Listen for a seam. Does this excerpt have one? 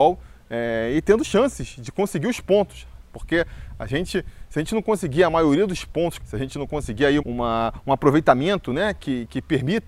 yes; 2 cuts; at 6.2 s, 7.2 s

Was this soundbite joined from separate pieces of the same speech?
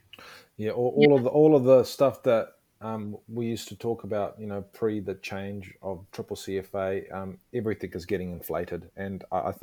no; 0 cuts

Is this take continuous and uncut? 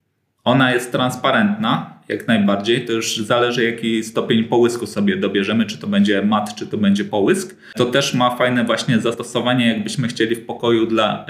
yes; 0 cuts

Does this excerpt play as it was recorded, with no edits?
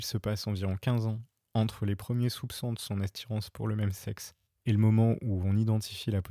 yes; 0 cuts

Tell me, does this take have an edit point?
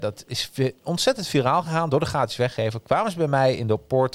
no; 0 cuts

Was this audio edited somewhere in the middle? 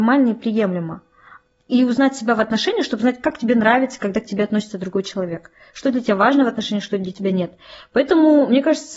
no; 0 cuts

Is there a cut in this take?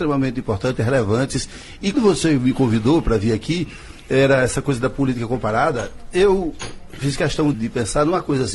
yes; 2 cuts; at 1.9 s, 7.5 s

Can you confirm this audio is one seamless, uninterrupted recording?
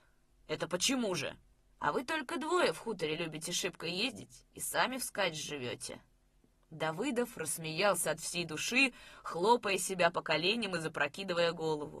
yes; 0 cuts

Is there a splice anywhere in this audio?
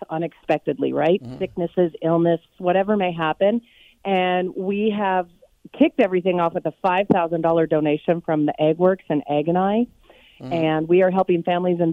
yes; 1 cut; at 2.5 s

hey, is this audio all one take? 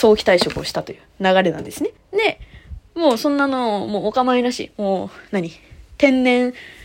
no; 1 cut; at 2.0 s

